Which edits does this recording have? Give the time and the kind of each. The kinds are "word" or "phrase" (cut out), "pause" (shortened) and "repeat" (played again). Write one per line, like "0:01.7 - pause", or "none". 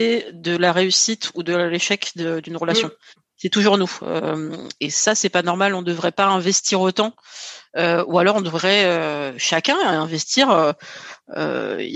none